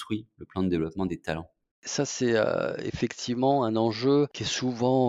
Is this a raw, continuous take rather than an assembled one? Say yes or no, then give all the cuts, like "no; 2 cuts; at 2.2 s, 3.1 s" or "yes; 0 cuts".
yes; 0 cuts